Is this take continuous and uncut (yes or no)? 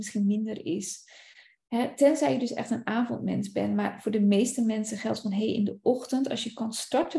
yes